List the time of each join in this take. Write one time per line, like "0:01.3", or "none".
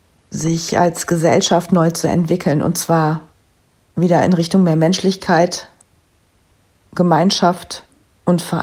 none